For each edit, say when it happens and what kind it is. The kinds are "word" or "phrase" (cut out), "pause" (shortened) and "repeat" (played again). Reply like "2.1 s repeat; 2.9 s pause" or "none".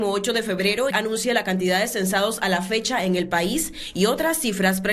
0.9 s word